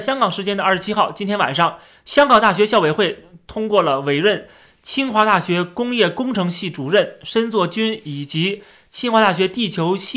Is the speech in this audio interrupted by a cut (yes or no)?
no